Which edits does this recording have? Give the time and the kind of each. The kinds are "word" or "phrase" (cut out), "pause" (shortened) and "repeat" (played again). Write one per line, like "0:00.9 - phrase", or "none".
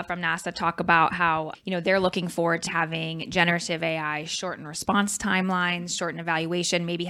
0:01.5 - word
0:02.7 - word

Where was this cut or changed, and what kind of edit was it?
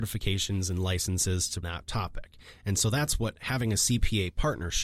0:01.6 - phrase

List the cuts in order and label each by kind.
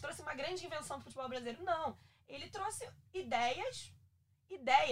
none

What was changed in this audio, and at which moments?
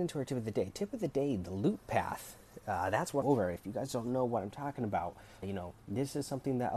0:03.2 - phrase
0:05.4 - word
0:05.8 - pause

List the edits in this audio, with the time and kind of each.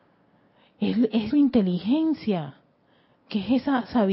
0:01.3 - phrase

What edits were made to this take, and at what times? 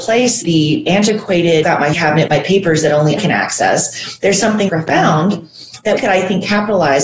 0:01.6 - word
0:01.9 - word
0:02.3 - word
0:03.2 - word
0:04.7 - word
0:06.0 - word

